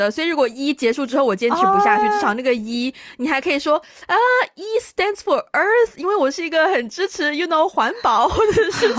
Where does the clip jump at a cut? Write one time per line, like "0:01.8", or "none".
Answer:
none